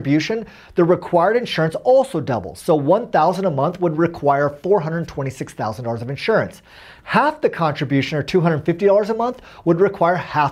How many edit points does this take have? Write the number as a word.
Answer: zero